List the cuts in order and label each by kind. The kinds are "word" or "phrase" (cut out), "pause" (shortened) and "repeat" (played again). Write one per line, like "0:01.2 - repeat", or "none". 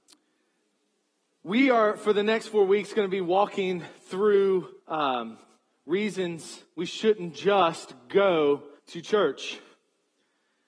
0:04.8 - pause
0:06.7 - pause
0:08.8 - pause